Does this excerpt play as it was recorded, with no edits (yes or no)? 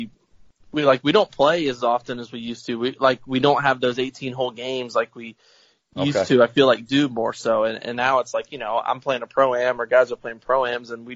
yes